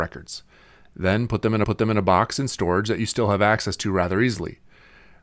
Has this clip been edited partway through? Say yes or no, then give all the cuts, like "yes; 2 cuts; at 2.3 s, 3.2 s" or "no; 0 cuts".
yes; 1 cut; at 1.6 s